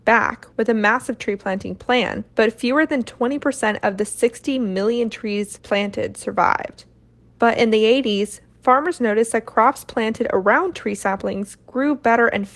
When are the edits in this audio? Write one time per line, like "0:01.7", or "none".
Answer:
none